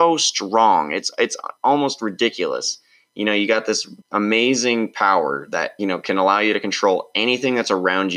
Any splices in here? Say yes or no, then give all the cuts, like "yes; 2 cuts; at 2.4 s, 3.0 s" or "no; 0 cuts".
yes; 2 cuts; at 4.0 s, 5.8 s